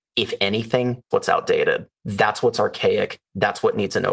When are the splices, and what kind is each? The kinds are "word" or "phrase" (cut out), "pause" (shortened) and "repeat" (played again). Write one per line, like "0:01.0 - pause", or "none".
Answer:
0:01.1 - word
0:01.9 - pause